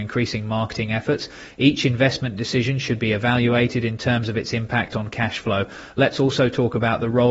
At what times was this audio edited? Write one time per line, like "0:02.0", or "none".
none